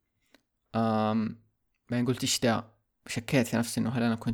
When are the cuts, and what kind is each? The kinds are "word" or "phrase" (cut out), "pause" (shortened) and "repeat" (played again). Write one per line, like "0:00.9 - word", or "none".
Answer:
none